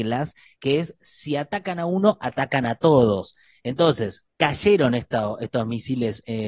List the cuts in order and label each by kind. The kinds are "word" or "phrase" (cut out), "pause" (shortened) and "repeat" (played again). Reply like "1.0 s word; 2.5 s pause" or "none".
4.3 s pause